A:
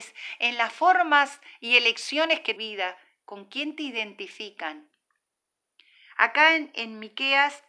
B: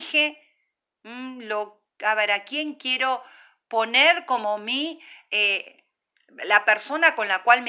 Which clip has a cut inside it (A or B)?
A